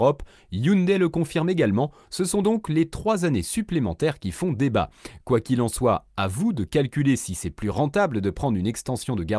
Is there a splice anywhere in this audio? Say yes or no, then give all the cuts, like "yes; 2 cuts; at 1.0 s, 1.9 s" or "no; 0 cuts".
no; 0 cuts